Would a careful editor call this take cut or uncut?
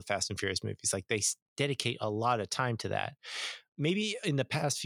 uncut